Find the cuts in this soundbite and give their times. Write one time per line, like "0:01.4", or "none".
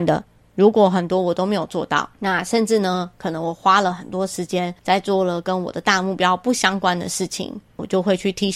0:02.1
0:04.8